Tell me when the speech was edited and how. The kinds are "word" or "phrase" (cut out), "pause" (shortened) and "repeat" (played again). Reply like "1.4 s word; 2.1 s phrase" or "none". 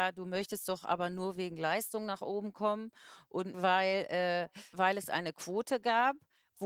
3.5 s word; 4.7 s word